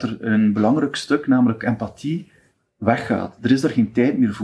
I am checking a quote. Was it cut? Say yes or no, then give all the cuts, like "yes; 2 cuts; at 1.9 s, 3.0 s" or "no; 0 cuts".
no; 0 cuts